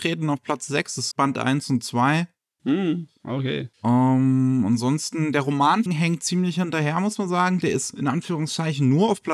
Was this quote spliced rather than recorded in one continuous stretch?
yes; 3 cuts; at 1.1 s, 3.7 s, 5.9 s

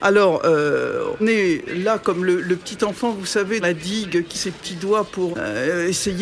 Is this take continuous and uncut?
no; 4 cuts; at 1.2 s, 3.6 s, 4.3 s, 5.3 s

